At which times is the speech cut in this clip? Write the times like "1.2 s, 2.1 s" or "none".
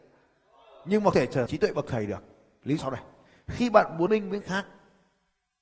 1.1 s, 1.5 s, 2.8 s, 4.1 s, 4.4 s